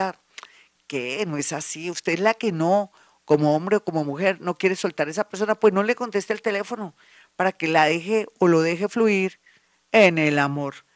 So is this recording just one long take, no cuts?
yes; 0 cuts

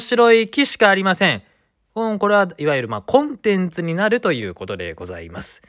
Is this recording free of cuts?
yes; 0 cuts

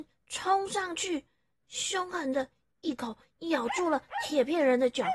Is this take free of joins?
yes; 0 cuts

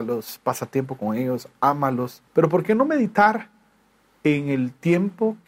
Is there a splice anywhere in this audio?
yes; 1 cut; at 2.3 s

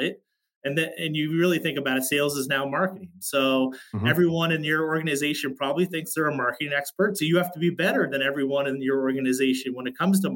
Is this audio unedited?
yes; 0 cuts

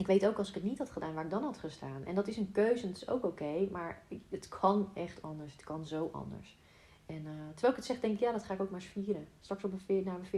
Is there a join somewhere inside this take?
no; 0 cuts

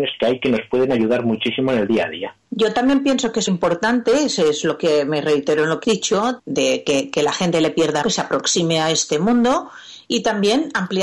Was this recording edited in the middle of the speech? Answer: yes; 4 cuts; at 3.5 s, 5.8 s, 6.4 s, 8.0 s

